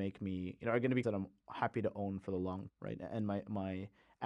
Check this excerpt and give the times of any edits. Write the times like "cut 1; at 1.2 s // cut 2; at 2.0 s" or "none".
cut 1; at 1.0 s // cut 2; at 2.7 s